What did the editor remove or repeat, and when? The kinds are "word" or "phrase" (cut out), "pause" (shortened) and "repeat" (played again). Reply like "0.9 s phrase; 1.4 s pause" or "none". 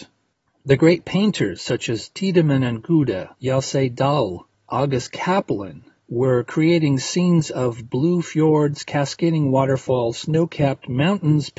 3.3 s pause